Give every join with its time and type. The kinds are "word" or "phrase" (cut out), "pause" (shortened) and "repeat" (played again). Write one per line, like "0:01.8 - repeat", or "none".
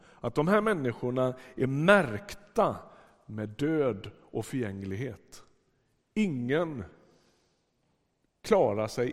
none